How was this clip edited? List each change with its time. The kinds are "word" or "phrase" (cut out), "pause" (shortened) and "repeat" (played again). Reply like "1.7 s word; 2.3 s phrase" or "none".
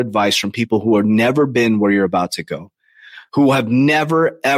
none